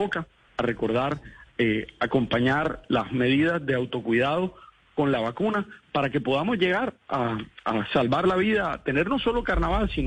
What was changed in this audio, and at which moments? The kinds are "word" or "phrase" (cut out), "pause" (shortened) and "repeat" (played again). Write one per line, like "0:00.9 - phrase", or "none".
none